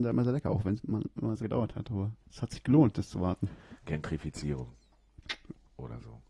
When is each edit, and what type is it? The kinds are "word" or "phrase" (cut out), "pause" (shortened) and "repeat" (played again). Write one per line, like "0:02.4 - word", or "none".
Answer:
0:01.4 - word
0:02.2 - pause
0:03.8 - pause